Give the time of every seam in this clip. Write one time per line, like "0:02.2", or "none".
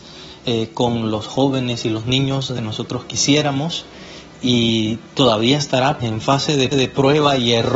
0:02.6
0:06.0
0:06.7

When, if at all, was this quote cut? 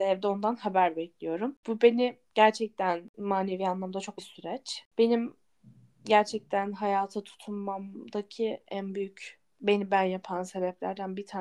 0:04.2

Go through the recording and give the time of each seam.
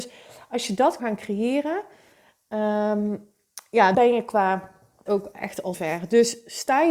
0:01.0
0:03.9
0:05.1
0:05.7

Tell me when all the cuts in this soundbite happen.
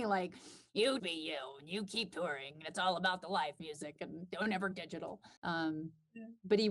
0:01.0
0:04.7
0:05.4

